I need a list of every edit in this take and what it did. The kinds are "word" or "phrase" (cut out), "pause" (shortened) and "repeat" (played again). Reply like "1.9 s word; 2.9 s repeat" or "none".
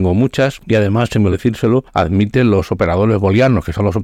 1.3 s word

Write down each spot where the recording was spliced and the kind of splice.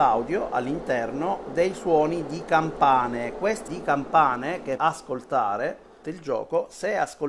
1.5 s word; 3.7 s word; 4.8 s word; 6.0 s word

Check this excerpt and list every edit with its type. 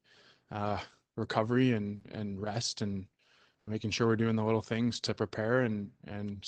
none

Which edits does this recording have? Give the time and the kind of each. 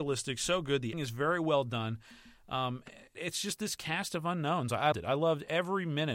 0.9 s word; 3.1 s word; 4.9 s word

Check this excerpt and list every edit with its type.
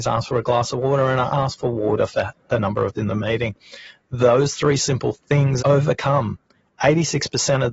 3.0 s word; 5.6 s word

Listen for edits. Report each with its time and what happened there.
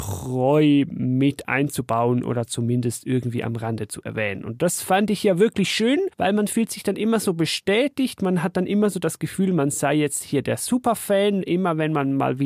6.1 s pause

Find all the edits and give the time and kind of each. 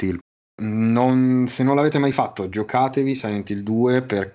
none

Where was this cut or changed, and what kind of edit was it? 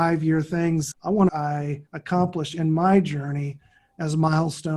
0.9 s word; 1.3 s phrase; 1.9 s pause

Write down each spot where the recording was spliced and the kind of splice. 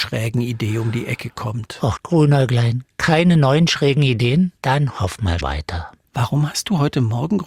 2.0 s word; 4.6 s pause; 5.4 s word

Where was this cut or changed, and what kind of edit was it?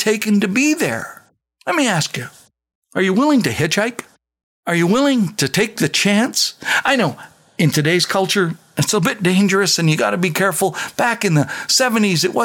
none

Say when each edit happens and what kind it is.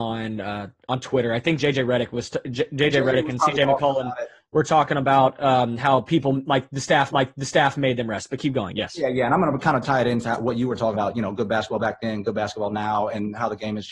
7.1 s repeat; 10.9 s word

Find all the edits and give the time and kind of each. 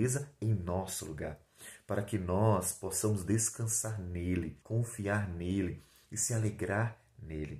4.6 s pause

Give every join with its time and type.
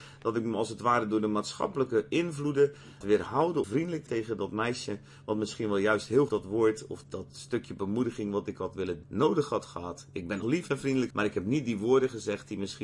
3.0 s word; 3.6 s word; 4.1 s word; 6.3 s word; 7.0 s word; 9.0 s word; 10.4 s word; 11.1 s word

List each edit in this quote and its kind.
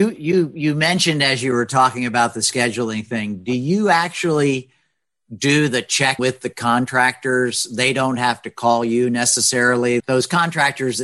6.2 s word; 10.0 s word

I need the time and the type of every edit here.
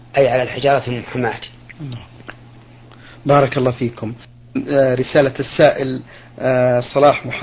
none

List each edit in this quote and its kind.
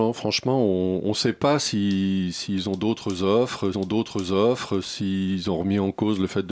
3.7 s repeat

